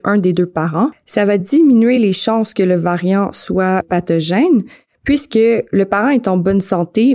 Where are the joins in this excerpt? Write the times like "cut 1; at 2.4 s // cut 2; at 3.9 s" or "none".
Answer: none